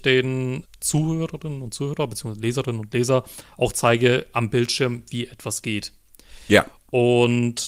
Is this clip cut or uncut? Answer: uncut